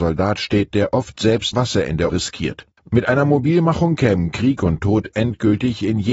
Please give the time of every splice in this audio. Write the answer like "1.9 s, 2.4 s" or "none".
1.5 s, 2.1 s, 2.8 s